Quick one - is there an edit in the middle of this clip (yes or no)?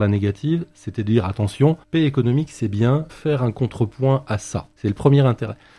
yes